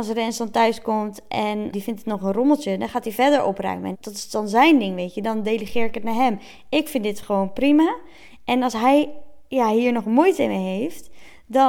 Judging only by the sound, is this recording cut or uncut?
cut